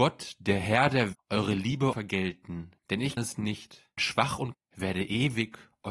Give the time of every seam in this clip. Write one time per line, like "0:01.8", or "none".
0:01.1
0:01.9
0:02.8
0:03.2
0:04.0
0:04.5

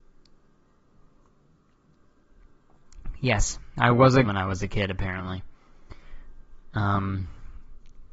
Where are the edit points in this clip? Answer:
0:04.2

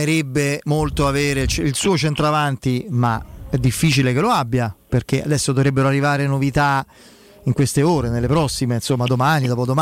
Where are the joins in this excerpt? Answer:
none

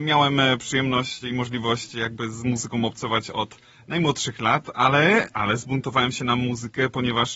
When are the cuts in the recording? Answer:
none

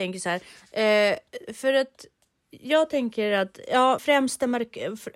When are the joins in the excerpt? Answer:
0:04.0

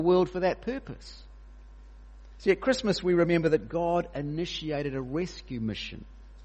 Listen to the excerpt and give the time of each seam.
none

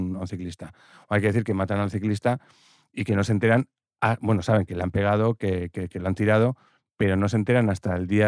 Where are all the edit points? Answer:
none

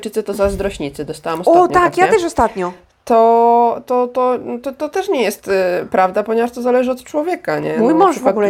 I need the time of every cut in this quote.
none

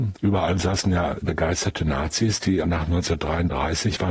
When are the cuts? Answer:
0:02.6

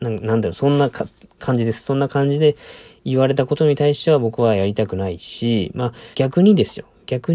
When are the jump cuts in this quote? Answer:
0:06.1

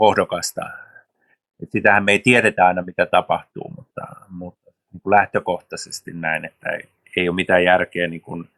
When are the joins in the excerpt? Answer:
none

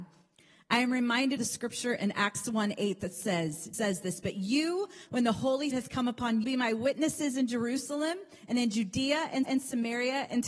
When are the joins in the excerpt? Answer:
0:01.4
0:03.7
0:05.1
0:05.7
0:06.4
0:09.4

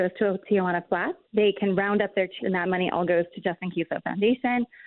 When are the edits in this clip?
0:01.2
0:02.4

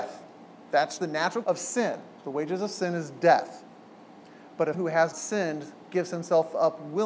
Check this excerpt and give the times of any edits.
0:01.0
0:01.4
0:04.7
0:05.1

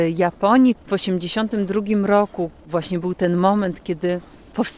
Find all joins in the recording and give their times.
none

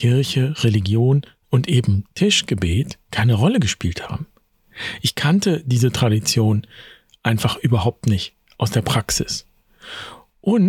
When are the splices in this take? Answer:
none

